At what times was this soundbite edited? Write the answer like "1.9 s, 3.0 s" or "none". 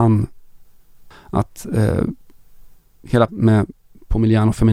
1.1 s, 3.3 s